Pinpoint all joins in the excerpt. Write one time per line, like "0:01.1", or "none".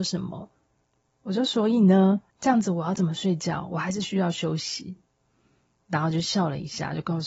0:02.3